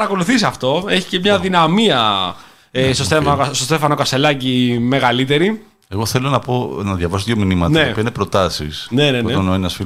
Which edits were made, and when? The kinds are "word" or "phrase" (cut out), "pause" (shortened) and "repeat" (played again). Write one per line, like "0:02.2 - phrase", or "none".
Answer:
none